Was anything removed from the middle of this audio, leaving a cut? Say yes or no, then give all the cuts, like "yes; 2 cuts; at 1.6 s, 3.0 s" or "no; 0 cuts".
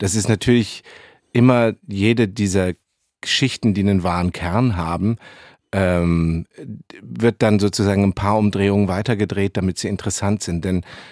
no; 0 cuts